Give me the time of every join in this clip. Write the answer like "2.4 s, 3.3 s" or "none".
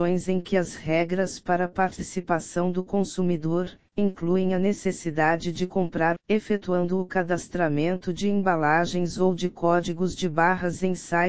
6.1 s